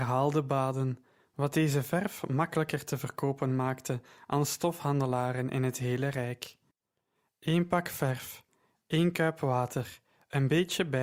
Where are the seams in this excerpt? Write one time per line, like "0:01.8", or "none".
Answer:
none